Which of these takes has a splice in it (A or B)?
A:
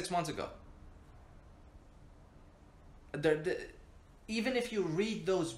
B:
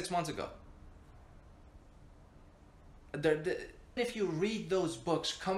B